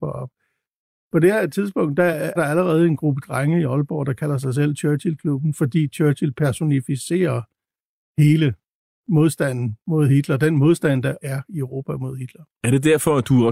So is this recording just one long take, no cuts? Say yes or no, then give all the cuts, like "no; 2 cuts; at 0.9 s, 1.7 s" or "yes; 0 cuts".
no; 2 cuts; at 2.4 s, 11.2 s